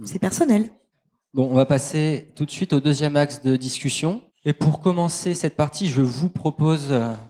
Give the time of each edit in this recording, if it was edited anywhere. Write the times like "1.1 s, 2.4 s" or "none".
4.3 s